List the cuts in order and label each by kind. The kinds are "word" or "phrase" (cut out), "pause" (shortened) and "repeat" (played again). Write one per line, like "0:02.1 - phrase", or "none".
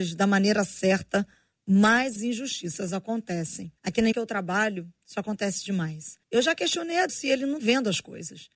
0:02.2 - word
0:03.8 - pause
0:04.1 - word
0:06.2 - pause
0:07.1 - word
0:07.6 - word